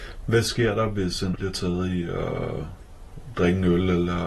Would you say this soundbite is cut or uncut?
cut